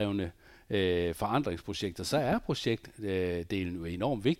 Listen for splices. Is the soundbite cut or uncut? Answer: uncut